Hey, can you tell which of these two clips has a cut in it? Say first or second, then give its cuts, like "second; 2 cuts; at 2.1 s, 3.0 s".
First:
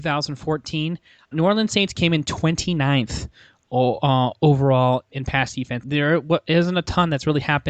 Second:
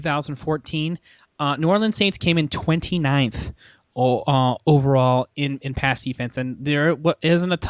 first; 3 cuts; at 1.3 s, 5.1 s, 5.8 s